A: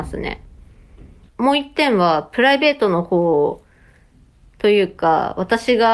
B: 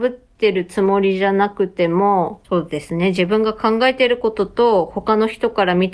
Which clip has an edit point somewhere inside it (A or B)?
B